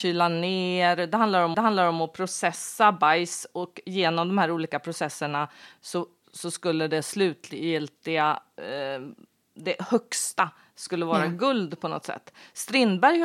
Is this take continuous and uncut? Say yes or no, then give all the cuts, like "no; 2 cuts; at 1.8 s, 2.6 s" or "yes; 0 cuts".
no; 1 cut; at 1.5 s